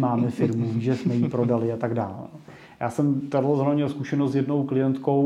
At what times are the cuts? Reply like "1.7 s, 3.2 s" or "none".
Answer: none